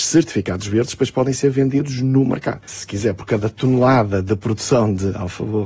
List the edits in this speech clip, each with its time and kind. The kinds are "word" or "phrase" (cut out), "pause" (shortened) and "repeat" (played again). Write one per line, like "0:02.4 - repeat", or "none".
none